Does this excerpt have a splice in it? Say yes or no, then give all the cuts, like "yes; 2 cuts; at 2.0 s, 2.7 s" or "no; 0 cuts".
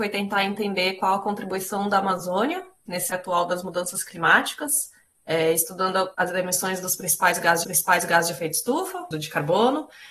yes; 4 cuts; at 3.1 s, 6.1 s, 7.6 s, 9.1 s